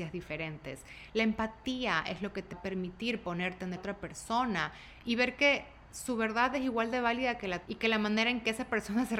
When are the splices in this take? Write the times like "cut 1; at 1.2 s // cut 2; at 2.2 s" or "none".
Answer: cut 1; at 2.5 s // cut 2; at 3.8 s // cut 3; at 7.7 s